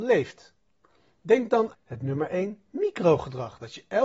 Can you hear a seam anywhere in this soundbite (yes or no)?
yes